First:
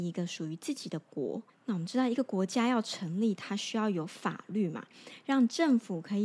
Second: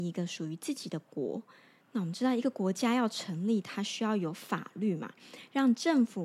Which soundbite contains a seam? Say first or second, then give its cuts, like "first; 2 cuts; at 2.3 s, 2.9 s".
first; 1 cut; at 1.5 s